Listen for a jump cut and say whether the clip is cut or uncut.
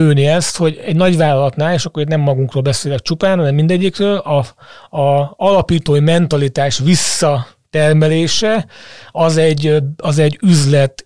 uncut